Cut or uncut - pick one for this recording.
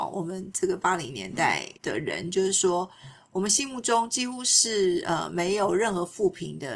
cut